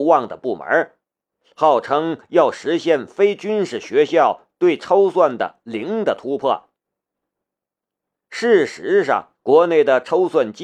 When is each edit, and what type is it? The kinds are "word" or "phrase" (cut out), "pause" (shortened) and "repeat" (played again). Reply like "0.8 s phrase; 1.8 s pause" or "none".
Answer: 9.3 s pause